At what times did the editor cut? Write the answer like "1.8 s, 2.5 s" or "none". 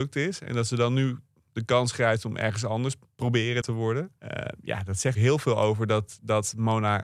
3.6 s, 4.2 s, 5.1 s